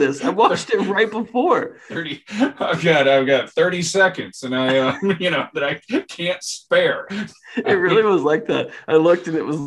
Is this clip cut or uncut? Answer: uncut